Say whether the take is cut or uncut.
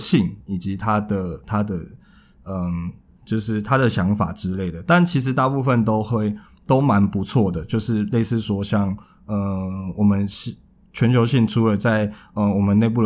uncut